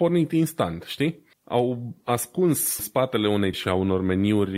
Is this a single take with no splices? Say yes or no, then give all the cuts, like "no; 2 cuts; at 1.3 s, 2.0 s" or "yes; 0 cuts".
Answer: no; 3 cuts; at 1.3 s, 2.8 s, 3.5 s